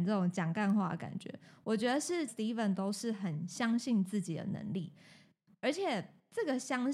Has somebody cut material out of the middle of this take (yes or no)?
yes